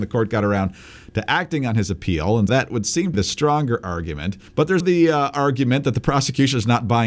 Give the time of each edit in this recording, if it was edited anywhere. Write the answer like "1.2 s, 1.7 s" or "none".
2.5 s, 3.1 s, 4.5 s, 4.8 s